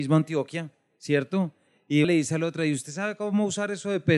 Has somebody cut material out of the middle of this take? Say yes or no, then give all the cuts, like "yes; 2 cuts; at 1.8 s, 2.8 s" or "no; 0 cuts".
yes; 1 cut; at 2.0 s